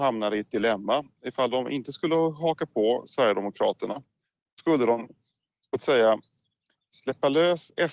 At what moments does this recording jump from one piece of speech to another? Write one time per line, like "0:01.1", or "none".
none